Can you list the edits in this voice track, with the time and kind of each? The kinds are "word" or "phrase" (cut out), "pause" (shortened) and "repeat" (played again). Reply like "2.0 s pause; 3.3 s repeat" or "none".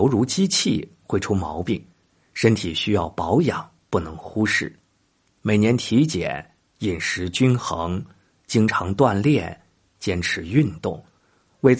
none

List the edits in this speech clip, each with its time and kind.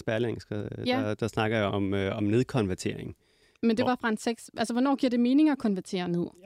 1.7 s word

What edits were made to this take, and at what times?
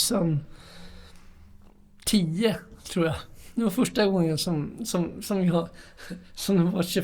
none

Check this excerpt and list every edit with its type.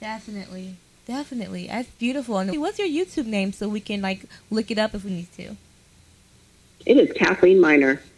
2.5 s word

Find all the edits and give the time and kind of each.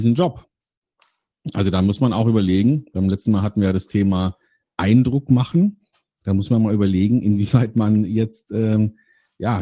none

